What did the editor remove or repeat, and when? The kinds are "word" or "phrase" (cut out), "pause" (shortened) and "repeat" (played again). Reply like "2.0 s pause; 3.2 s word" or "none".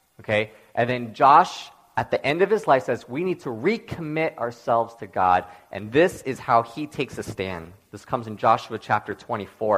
none